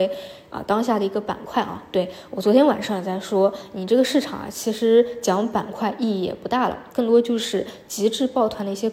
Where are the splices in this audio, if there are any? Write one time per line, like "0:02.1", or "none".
0:06.9

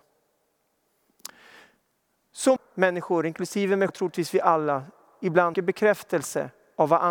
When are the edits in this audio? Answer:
0:02.6
0:03.9
0:05.5

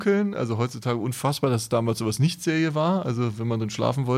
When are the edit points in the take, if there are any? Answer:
none

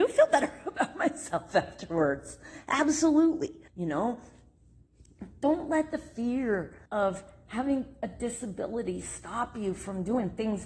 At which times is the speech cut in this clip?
0:03.7
0:06.9

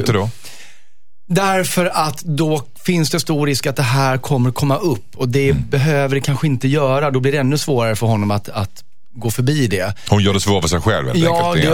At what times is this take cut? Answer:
none

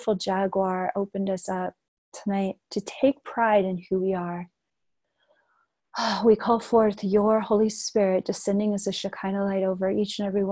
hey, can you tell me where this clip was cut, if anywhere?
none

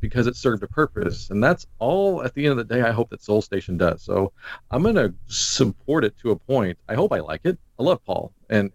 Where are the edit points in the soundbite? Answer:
0:07.7

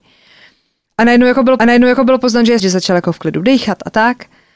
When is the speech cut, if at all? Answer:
0:01.6
0:02.6

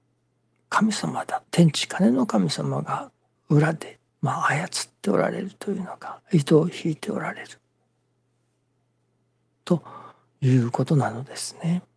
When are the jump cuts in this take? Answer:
0:01.5
0:03.4
0:04.1

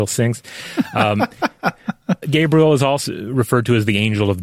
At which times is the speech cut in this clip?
0:02.2
0:03.1

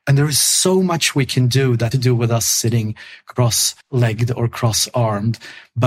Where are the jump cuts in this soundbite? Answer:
0:01.9
0:03.8

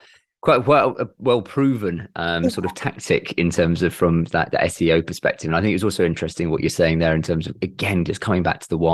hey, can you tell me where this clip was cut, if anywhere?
none

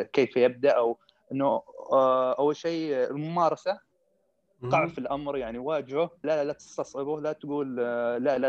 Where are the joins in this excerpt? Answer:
0:06.2

